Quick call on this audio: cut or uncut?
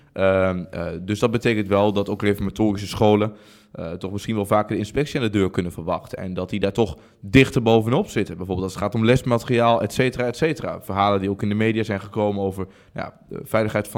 uncut